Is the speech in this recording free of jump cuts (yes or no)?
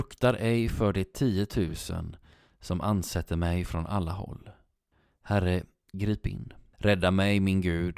yes